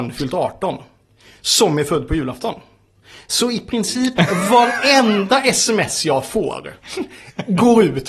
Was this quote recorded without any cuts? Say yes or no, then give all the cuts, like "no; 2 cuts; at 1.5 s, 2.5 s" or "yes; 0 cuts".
yes; 0 cuts